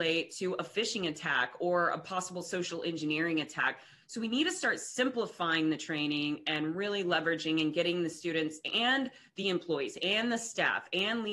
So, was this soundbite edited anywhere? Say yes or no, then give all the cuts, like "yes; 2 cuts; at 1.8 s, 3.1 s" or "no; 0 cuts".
no; 0 cuts